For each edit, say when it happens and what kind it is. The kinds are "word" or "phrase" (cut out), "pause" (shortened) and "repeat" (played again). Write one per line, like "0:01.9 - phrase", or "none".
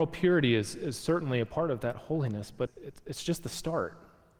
0:02.7 - word